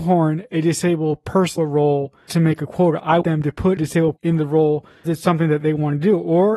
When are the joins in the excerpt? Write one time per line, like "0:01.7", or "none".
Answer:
0:01.6
0:02.3
0:03.2
0:03.8
0:04.2
0:05.0